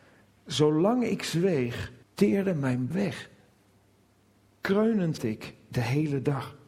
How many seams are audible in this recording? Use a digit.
3